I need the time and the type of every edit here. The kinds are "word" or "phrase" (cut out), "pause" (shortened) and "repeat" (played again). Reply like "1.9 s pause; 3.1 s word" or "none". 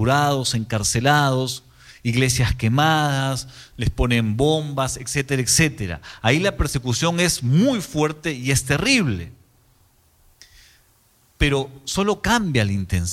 none